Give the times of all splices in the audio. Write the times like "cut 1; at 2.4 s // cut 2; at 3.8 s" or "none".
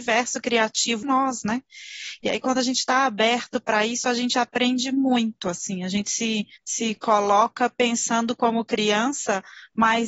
cut 1; at 1.0 s // cut 2; at 6.6 s